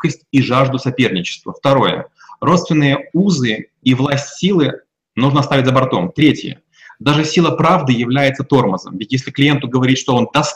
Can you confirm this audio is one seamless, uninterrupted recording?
yes; 0 cuts

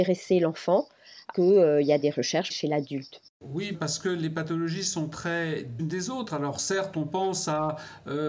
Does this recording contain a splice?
yes; 5 cuts; at 1.3 s, 2.0 s, 2.5 s, 3.7 s, 5.8 s

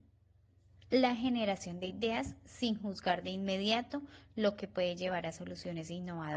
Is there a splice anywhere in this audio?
no; 0 cuts

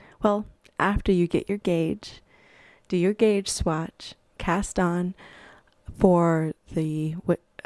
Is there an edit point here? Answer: no; 0 cuts

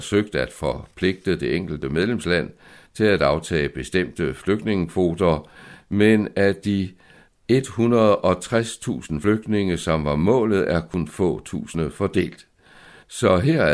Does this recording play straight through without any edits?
yes; 0 cuts

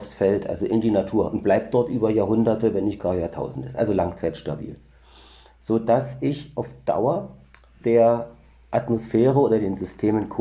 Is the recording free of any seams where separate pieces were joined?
yes; 0 cuts

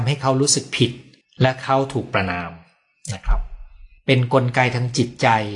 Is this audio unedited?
no; 1 cut; at 1.2 s

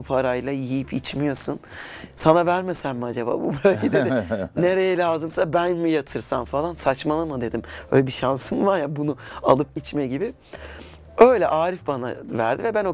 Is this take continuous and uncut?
no; 1 cut; at 9.8 s

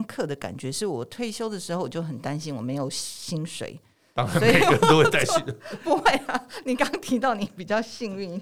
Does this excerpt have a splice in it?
no; 0 cuts

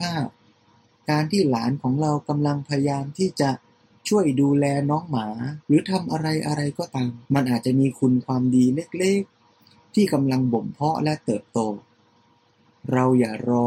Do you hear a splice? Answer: yes; 2 cuts; at 5.6 s, 7.2 s

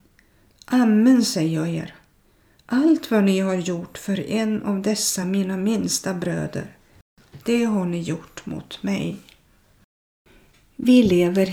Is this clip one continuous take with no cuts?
yes; 0 cuts

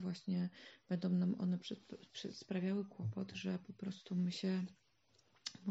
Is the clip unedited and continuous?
yes; 0 cuts

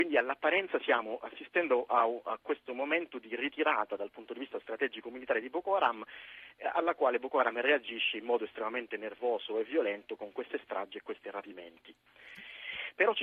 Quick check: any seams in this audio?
no; 0 cuts

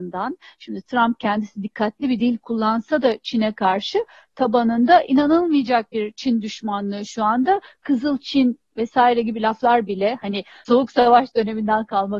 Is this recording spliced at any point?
no; 0 cuts

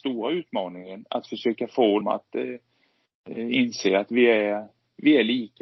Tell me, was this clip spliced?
yes; 1 cut; at 2.0 s

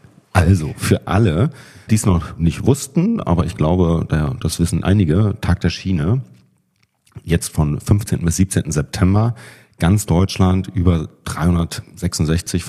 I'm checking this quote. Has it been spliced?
yes; 2 cuts; at 1.9 s, 4.8 s

